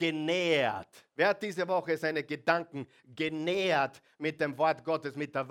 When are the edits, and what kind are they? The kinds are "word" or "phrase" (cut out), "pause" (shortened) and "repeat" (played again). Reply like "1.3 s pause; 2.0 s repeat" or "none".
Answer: 1.1 s pause